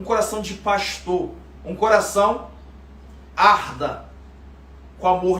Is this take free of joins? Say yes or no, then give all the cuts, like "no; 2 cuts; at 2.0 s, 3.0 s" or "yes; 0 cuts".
no; 1 cut; at 3.3 s